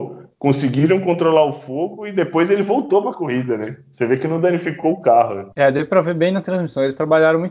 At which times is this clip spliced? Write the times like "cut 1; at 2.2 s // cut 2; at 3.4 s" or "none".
cut 1; at 5.5 s